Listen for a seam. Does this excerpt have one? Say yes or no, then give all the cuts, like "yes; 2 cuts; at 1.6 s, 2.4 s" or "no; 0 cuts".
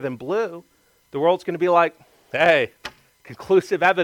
no; 0 cuts